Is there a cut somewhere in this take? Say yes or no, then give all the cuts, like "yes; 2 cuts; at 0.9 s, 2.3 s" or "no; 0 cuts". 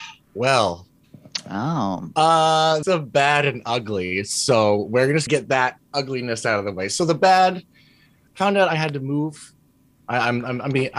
yes; 3 cuts; at 2.8 s, 5.3 s, 8.3 s